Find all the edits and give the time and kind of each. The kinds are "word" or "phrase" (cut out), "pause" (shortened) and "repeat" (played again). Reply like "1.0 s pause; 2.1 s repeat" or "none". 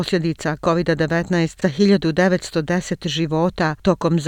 1.6 s word